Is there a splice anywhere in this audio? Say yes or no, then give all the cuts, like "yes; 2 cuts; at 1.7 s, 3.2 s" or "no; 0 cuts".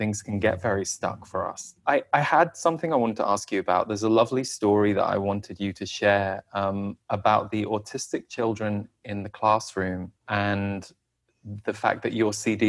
yes; 3 cuts; at 1.8 s, 7.0 s, 10.2 s